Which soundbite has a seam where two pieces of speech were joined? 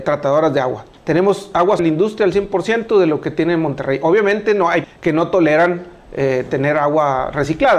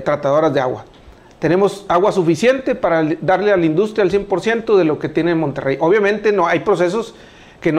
first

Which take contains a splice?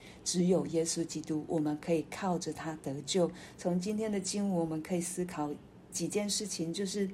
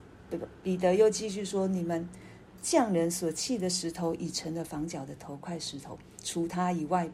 first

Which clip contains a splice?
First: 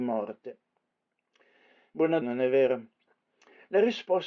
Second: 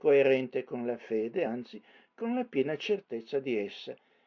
first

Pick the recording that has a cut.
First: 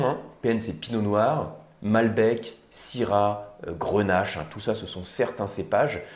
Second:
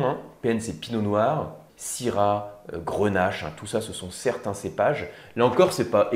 second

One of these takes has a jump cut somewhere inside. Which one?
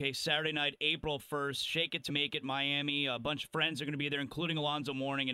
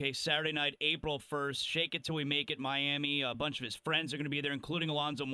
first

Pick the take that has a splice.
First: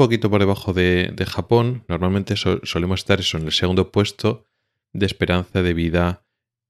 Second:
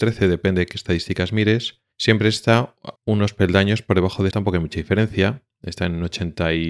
second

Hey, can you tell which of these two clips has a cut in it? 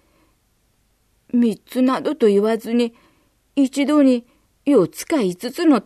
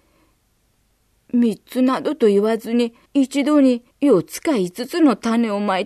second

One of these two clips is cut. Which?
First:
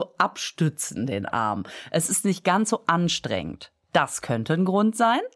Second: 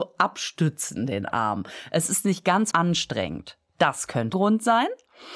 second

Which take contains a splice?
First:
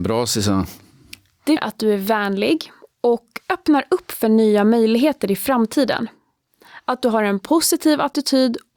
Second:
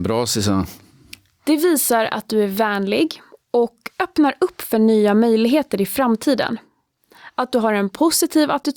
first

